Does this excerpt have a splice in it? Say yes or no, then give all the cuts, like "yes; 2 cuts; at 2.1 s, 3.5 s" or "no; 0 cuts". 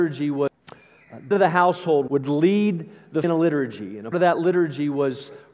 yes; 4 cuts; at 1.3 s, 2.1 s, 3.2 s, 4.1 s